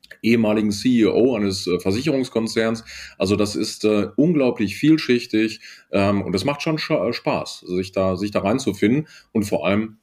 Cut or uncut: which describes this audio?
uncut